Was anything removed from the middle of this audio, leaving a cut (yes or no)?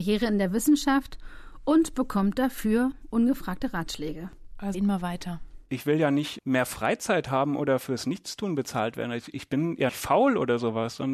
yes